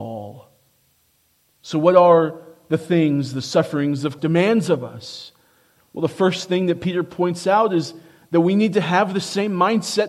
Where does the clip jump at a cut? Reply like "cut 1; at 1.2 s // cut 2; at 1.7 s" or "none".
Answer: cut 1; at 4.2 s